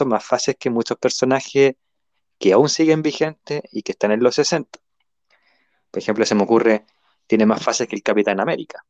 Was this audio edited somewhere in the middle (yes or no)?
no